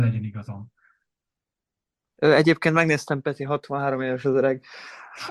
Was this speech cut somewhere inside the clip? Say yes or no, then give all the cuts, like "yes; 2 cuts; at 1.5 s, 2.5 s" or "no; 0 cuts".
no; 0 cuts